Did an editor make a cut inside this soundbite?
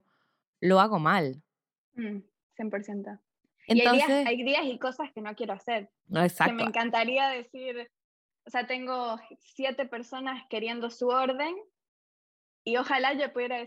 no; 0 cuts

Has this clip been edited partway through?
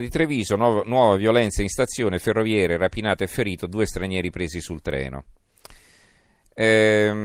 no; 0 cuts

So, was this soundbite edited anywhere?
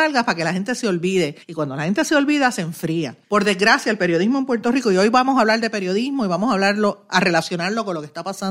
yes; 2 cuts; at 1.4 s, 3.2 s

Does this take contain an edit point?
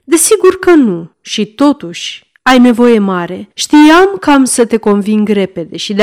yes; 3 cuts; at 1.1 s, 2.4 s, 3.5 s

